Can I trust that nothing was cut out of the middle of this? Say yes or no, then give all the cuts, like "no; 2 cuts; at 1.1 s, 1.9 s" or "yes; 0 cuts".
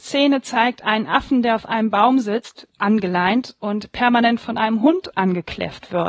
yes; 0 cuts